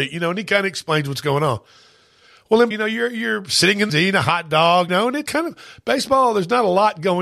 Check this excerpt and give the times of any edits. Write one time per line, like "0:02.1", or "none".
0:02.7
0:03.9
0:04.9
0:05.3